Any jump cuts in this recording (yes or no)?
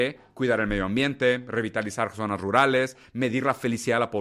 no